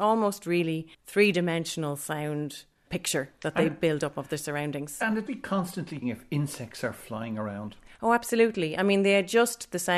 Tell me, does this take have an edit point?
yes; 3 cuts; at 0.9 s, 5.3 s, 6.0 s

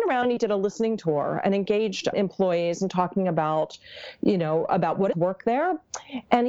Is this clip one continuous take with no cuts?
no; 2 cuts; at 2.1 s, 5.1 s

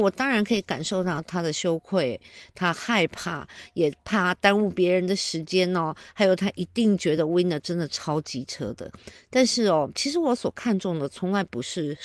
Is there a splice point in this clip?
no; 0 cuts

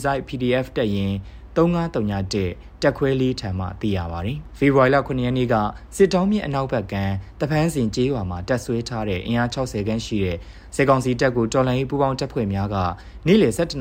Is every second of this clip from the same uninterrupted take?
yes; 0 cuts

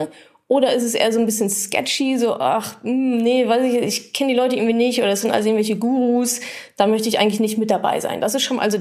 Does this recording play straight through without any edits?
yes; 0 cuts

